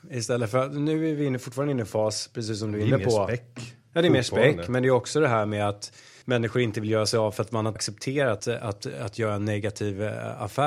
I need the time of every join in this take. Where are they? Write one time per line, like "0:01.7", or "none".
0:06.2
0:07.8
0:08.4